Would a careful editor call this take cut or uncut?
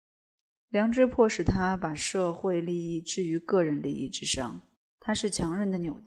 cut